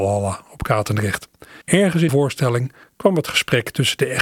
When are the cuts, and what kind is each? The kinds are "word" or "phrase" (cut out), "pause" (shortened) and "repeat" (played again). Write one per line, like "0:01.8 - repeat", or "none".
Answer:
0:01.6 - pause
0:02.1 - word
0:02.8 - pause